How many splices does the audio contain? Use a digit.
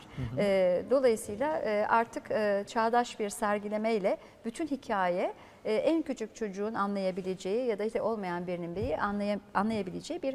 1